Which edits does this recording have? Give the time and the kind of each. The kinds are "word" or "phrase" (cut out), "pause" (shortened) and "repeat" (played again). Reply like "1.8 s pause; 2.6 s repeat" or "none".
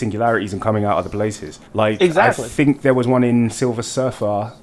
1.7 s pause